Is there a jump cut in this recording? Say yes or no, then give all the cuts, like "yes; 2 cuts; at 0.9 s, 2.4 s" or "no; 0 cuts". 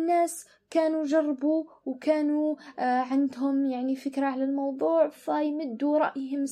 no; 0 cuts